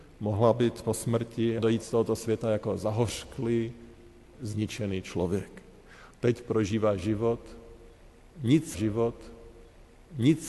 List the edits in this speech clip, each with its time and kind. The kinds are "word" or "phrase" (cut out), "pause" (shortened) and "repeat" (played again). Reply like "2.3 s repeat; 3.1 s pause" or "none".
1.6 s word; 8.7 s repeat

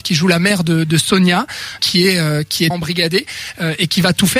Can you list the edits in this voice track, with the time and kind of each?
1.8 s word; 2.7 s word

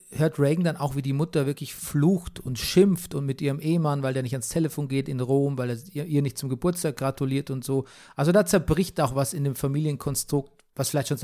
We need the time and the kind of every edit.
none

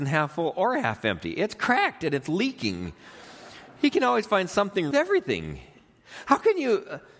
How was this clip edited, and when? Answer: 4.9 s phrase

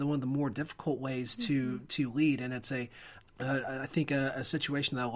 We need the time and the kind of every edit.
3.2 s word

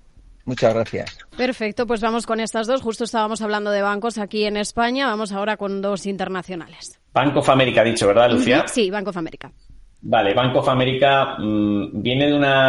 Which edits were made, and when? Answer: 1.3 s pause; 2.3 s word; 7.1 s pause; 10.3 s word

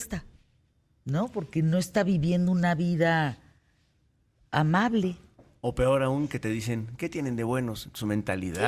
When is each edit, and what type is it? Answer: none

